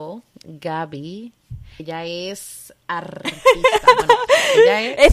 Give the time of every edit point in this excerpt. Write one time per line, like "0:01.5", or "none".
0:01.8

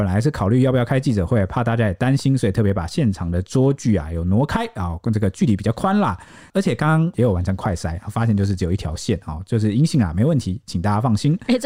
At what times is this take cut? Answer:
none

